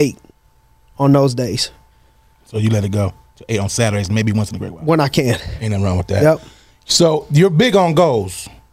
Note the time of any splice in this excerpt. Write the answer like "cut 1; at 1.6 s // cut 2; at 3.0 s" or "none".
none